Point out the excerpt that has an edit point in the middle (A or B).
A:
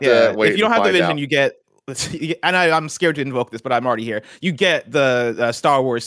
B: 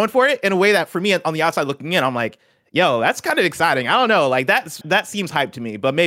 B